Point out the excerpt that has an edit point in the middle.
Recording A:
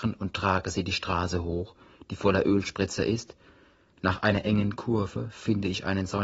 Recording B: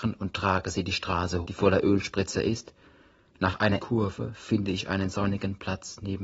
B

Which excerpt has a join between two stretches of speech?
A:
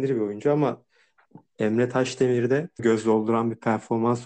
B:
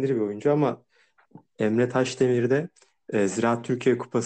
A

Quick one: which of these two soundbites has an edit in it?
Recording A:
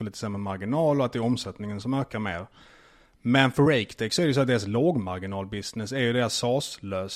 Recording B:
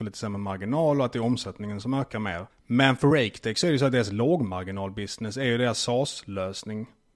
B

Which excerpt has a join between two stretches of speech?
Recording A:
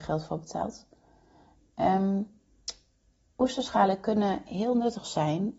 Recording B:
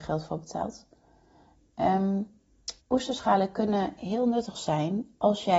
B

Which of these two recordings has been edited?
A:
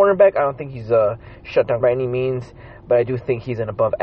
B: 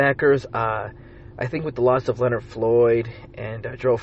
A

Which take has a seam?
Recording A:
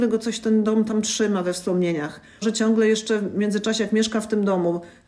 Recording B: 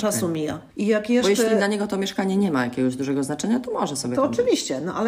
A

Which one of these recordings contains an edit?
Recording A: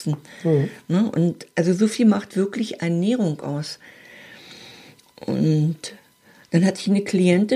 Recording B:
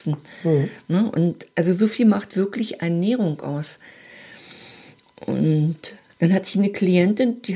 B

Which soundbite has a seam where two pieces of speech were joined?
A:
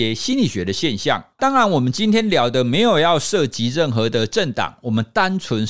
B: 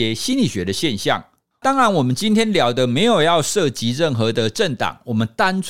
A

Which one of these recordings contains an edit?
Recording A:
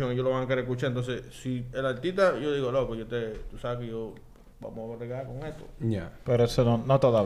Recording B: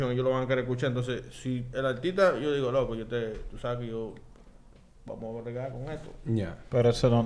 A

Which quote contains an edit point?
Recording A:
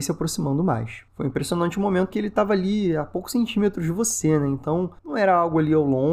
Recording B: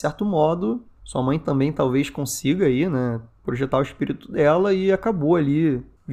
A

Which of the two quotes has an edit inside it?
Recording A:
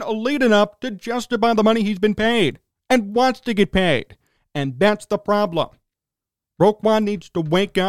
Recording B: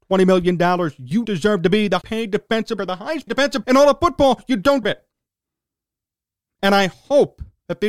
B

